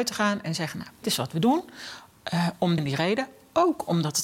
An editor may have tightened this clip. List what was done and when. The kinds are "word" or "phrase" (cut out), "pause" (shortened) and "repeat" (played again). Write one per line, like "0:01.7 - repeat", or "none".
0:01.0 - word
0:02.8 - word